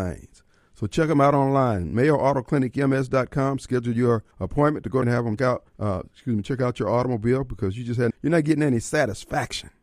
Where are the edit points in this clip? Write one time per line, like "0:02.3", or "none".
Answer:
0:04.3
0:05.0
0:05.4
0:05.7
0:08.1

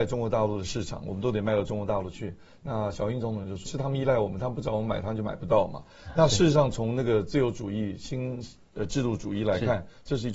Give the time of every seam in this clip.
0:03.7

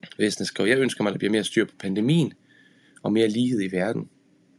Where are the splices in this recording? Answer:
none

